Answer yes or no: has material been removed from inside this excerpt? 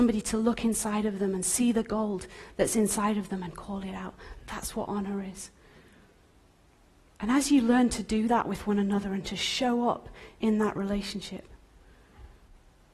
no